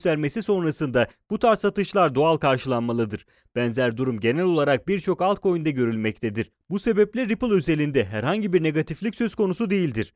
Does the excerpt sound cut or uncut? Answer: uncut